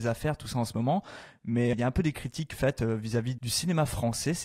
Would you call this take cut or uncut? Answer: cut